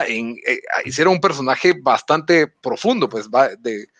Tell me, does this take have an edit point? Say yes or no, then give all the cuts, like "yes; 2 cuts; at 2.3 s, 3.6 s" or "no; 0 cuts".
no; 0 cuts